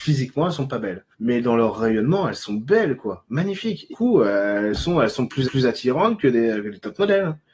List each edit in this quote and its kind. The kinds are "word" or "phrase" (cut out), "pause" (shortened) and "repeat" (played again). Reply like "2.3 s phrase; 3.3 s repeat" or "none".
1.1 s pause; 3.9 s word; 5.4 s repeat